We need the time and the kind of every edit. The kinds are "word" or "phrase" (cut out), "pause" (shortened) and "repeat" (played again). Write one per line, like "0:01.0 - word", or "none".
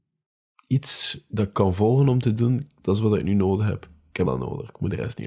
0:01.5 - word
0:04.2 - word